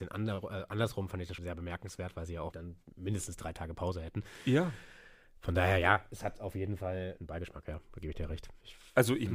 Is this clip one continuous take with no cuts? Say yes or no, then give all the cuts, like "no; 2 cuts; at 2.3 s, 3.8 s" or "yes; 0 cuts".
no; 3 cuts; at 1.4 s, 2.5 s, 7.2 s